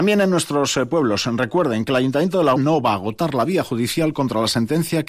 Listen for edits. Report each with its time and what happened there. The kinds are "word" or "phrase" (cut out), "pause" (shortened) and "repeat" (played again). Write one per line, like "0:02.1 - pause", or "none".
0:02.6 - word